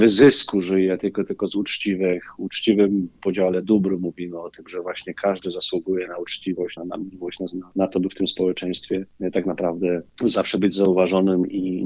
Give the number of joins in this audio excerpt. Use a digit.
1